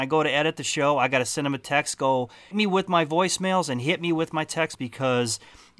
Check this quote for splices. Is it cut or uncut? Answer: cut